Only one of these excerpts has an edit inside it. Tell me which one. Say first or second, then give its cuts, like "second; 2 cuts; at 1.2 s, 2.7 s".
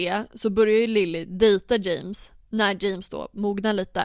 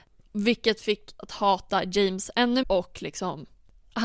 second; 2 cuts; at 1.2 s, 2.6 s